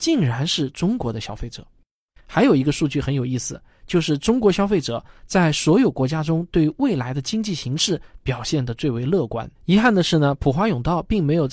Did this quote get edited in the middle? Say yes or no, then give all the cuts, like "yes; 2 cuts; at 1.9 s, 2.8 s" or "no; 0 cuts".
yes; 1 cut; at 9.5 s